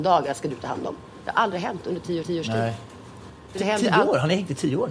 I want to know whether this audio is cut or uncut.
cut